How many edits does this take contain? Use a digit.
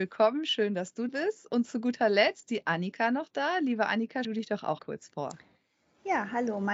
4